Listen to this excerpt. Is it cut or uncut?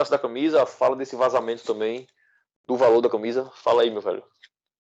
uncut